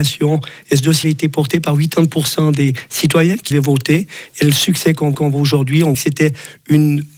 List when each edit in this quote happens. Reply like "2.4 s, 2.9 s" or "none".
1.0 s, 3.5 s, 5.1 s, 5.9 s